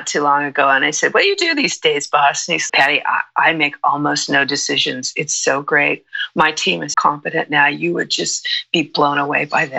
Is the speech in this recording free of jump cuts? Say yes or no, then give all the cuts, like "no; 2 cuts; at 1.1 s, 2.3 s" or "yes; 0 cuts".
no; 2 cuts; at 2.7 s, 6.9 s